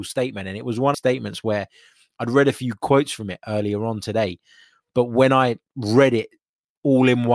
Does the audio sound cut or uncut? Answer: cut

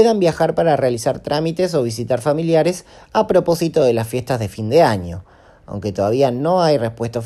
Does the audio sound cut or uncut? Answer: uncut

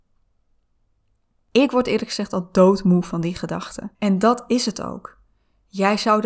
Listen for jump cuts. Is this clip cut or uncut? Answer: cut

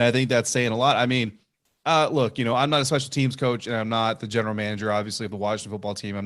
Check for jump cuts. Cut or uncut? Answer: uncut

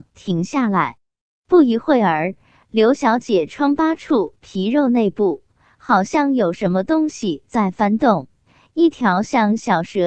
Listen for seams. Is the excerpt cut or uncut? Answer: uncut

